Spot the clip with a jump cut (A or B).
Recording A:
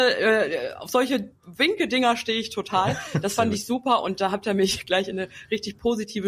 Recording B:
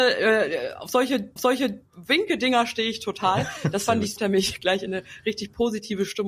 B